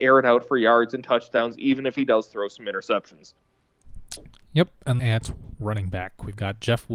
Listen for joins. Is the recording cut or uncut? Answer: cut